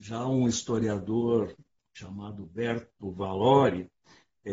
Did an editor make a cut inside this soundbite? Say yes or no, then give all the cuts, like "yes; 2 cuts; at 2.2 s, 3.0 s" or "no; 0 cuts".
yes; 1 cut; at 1.7 s